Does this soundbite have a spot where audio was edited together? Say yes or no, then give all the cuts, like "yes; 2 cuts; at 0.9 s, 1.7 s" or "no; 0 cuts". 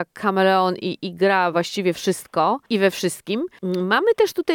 no; 0 cuts